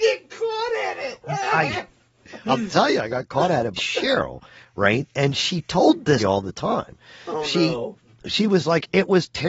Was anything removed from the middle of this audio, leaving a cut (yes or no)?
yes